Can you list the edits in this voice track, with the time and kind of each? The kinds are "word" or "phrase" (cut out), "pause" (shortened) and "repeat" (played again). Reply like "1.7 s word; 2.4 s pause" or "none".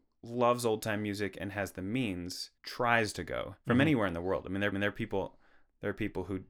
2.6 s pause; 3.6 s pause; 4.7 s repeat